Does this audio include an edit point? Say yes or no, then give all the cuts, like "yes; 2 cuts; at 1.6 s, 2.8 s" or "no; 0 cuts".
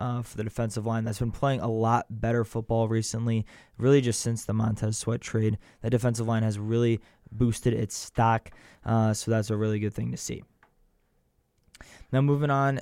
no; 0 cuts